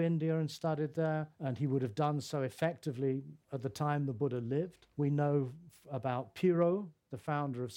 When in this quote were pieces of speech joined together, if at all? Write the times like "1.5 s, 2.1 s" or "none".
1.3 s, 3.4 s, 4.9 s